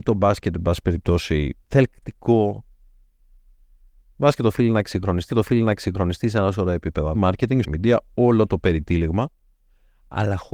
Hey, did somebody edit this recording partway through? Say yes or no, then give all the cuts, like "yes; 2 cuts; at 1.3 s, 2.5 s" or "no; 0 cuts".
yes; 4 cuts; at 1.6 s, 5.3 s, 7.2 s, 7.6 s